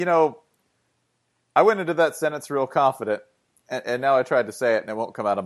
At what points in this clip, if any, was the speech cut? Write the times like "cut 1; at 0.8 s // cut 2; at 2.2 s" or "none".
none